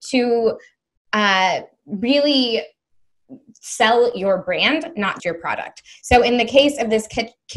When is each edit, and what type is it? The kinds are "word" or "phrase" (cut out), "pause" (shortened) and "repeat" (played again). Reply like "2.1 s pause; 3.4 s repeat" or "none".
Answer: 5.2 s word

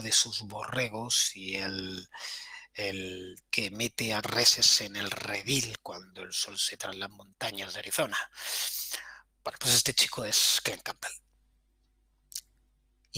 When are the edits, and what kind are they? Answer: 3.5 s word; 4.2 s phrase; 6.8 s word

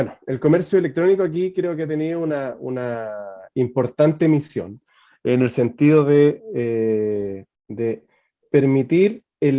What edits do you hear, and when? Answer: 7.6 s pause

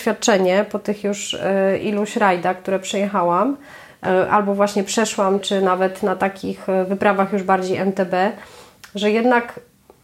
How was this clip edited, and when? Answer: 5.4 s word

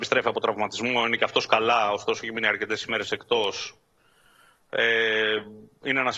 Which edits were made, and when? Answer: none

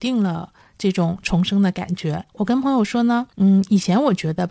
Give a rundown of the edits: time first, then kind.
2.3 s pause; 3.3 s pause

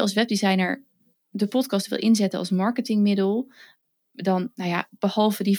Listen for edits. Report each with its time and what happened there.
none

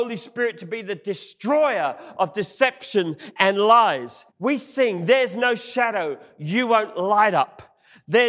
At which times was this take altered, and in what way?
4.3 s pause

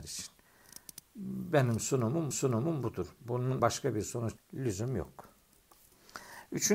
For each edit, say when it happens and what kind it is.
2.3 s repeat; 3.6 s word; 4.4 s word

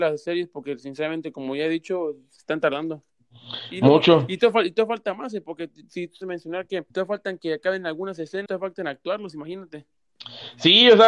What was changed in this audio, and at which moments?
6.2 s phrase; 6.9 s pause; 8.5 s word

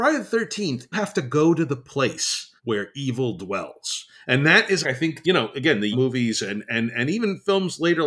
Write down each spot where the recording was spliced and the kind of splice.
0.9 s word; 2.6 s pause; 4.8 s phrase; 5.2 s word; 5.9 s phrase

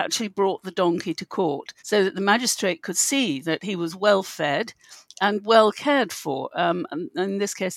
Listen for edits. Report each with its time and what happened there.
1.8 s pause

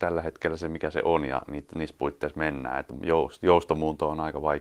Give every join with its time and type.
none

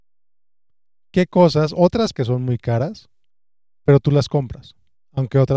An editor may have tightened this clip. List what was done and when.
2.1 s phrase

